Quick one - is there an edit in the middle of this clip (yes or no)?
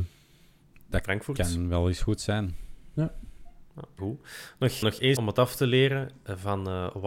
yes